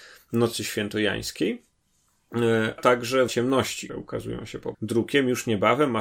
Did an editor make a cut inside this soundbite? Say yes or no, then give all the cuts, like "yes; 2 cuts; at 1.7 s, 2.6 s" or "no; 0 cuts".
yes; 4 cuts; at 2.8 s, 3.3 s, 3.9 s, 4.7 s